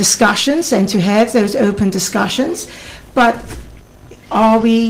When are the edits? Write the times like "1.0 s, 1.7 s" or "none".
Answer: none